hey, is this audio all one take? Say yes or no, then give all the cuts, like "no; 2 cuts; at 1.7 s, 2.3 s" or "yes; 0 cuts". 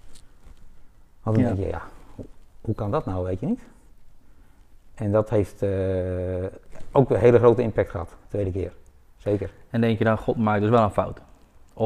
yes; 0 cuts